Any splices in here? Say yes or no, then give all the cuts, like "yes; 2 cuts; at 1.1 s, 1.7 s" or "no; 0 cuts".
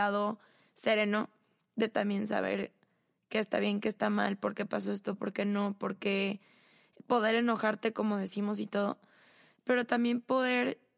no; 0 cuts